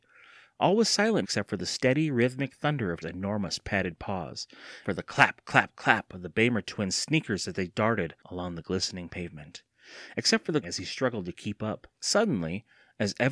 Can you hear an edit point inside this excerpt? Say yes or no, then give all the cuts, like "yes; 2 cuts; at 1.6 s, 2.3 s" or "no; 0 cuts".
yes; 6 cuts; at 1.2 s, 3.0 s, 4.8 s, 8.2 s, 10.6 s, 11.9 s